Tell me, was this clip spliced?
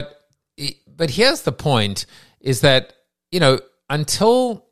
no; 0 cuts

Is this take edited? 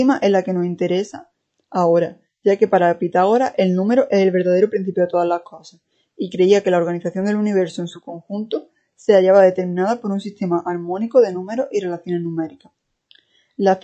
no; 0 cuts

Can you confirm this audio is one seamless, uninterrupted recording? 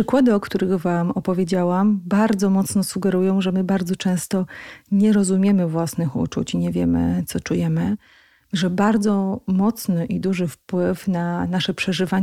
yes; 0 cuts

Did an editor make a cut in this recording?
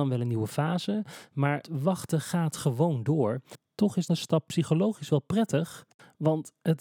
yes; 2 cuts; at 1.6 s, 4.1 s

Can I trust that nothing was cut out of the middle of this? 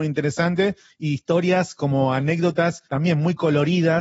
no; 1 cut; at 2.9 s

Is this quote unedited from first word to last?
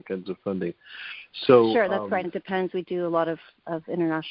no; 1 cut; at 2.2 s

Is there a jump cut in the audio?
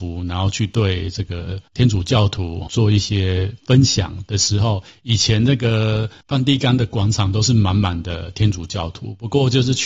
yes; 3 cuts; at 1.7 s, 2.7 s, 6.2 s

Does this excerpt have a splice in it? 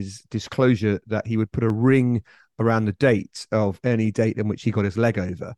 no; 0 cuts

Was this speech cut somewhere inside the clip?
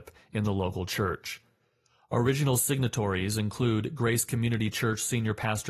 no; 0 cuts

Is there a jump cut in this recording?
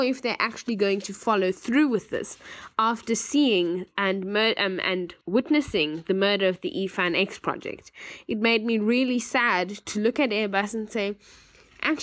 yes; 1 cut; at 5.2 s

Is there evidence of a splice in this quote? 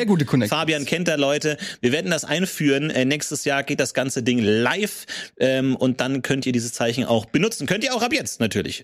no; 0 cuts

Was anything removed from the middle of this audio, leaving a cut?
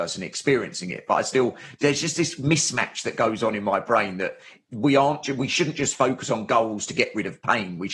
no; 0 cuts

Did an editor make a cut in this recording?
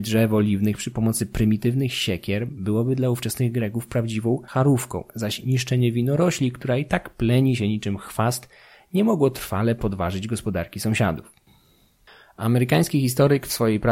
no; 0 cuts

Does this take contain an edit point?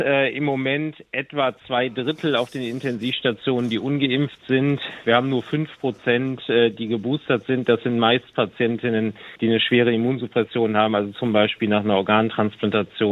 yes; 1 cut; at 9.4 s

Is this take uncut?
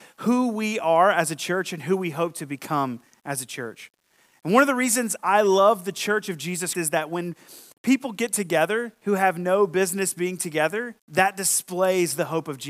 no; 3 cuts; at 6.7 s, 7.7 s, 11.0 s

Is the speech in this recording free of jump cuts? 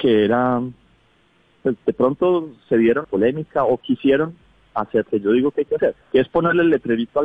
no; 3 cuts; at 3.0 s, 5.0 s, 6.0 s

